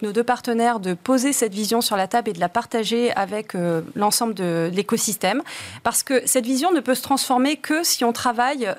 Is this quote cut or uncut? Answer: uncut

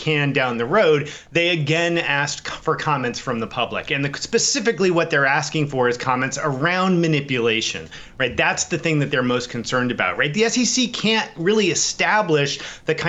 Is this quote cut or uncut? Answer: uncut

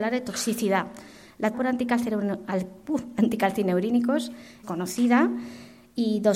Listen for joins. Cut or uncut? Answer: cut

